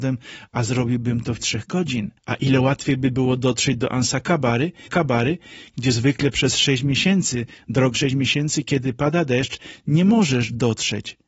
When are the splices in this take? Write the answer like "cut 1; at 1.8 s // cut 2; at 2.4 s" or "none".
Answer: cut 1; at 1.4 s // cut 2; at 2.2 s // cut 3; at 4.9 s // cut 4; at 7.9 s